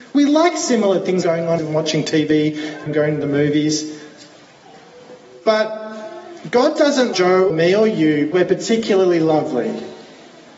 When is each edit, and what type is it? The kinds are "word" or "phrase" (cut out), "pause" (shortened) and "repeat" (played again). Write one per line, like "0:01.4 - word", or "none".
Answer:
0:01.2 - word
0:01.6 - word
0:02.9 - word
0:07.1 - word
0:07.5 - word
0:08.3 - word

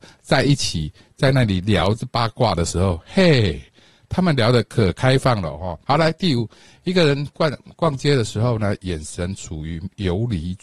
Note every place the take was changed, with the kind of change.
0:05.8 - pause

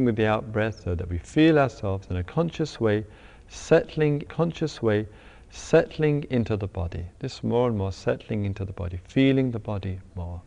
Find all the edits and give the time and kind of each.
0:04.3 - repeat

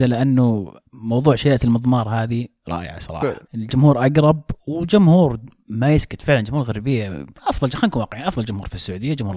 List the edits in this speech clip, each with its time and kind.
0:03.4 - pause
0:07.4 - pause

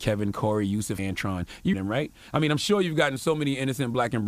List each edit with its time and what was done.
0:01.0 - word
0:01.7 - word

